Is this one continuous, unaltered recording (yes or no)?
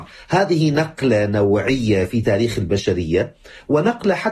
yes